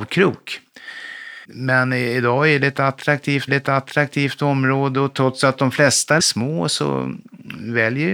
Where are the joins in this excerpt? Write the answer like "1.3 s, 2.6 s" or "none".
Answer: 1.4 s, 3.5 s, 6.2 s

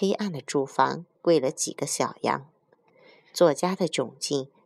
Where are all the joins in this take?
none

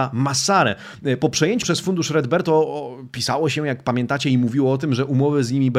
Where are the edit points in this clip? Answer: 1.6 s

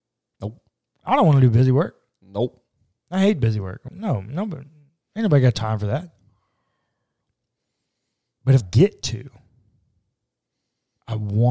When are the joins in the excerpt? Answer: 3.9 s, 8.6 s

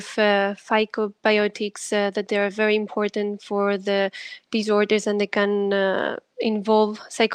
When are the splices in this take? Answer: none

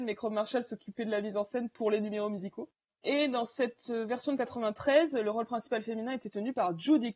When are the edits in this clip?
none

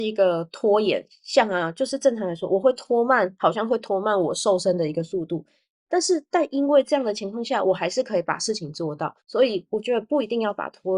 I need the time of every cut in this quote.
9.2 s

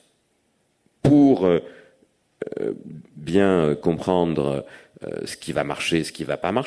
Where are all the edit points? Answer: none

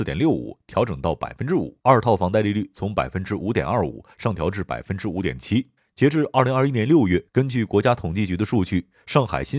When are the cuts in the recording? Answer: 1.8 s, 5.8 s, 7.3 s

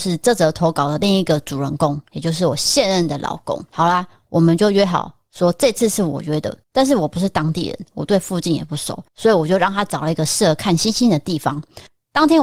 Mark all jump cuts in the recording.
3.7 s, 6.6 s, 9.1 s

